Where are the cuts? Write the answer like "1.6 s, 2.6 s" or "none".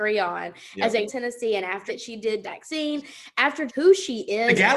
1.1 s, 1.9 s, 2.4 s, 3.7 s